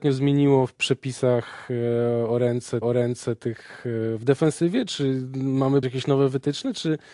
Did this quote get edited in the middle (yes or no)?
yes